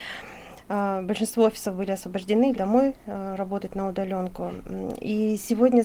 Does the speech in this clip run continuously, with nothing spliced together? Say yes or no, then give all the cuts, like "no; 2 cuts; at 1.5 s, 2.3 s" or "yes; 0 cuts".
no; 1 cut; at 2.5 s